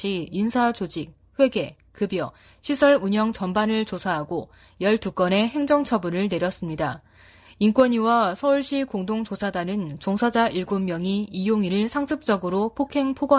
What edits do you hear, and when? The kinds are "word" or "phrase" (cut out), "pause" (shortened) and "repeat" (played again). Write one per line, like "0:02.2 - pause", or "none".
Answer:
none